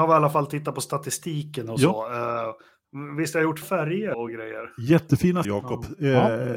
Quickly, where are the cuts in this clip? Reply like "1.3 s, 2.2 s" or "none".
3.6 s, 4.1 s, 5.4 s